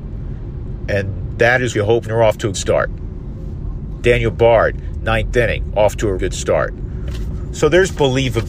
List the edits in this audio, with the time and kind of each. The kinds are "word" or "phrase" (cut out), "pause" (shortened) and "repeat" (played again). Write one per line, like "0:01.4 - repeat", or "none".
0:01.7 - word
0:02.0 - phrase
0:02.5 - word
0:06.2 - word